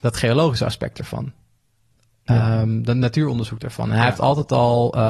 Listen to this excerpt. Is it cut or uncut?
uncut